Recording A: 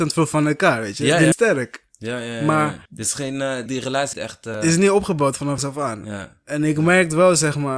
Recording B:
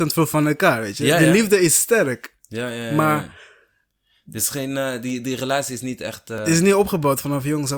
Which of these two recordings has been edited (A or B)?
A